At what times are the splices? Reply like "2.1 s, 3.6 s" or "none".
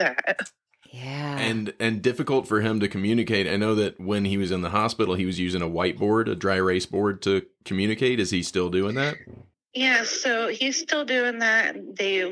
9.5 s